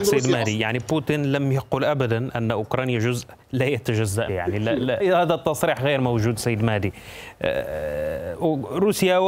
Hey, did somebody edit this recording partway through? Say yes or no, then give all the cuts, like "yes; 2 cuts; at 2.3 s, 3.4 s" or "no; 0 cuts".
yes; 3 cuts; at 3.4 s, 4.3 s, 5.0 s